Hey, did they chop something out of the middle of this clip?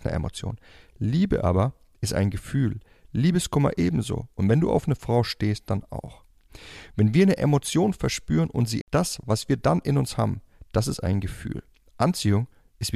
yes; 1 cut; at 8.8 s

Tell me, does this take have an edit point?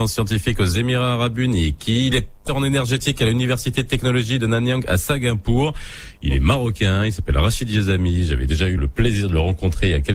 yes; 3 cuts; at 2.1 s, 2.5 s, 8.8 s

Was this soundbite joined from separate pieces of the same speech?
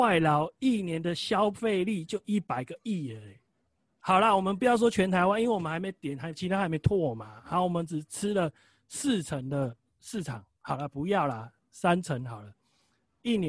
no; 0 cuts

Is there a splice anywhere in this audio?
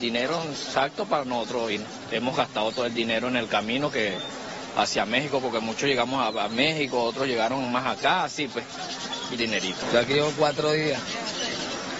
yes; 1 cut; at 9.3 s

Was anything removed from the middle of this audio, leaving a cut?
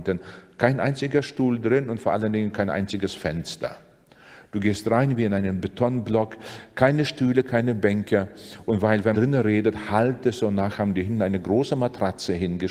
yes; 1 cut; at 9.1 s

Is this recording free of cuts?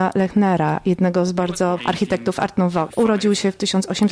no; 2 cuts; at 1.8 s, 2.9 s

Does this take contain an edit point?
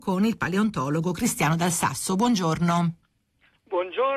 no; 0 cuts

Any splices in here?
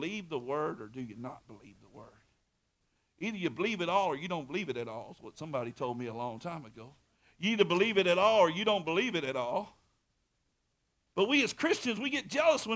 no; 0 cuts

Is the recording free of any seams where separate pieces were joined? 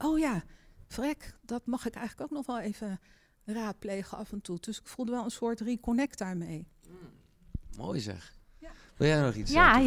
yes; 0 cuts

